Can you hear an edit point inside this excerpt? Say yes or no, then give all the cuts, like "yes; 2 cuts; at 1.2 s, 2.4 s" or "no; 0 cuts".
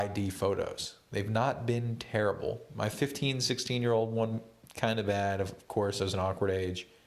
no; 0 cuts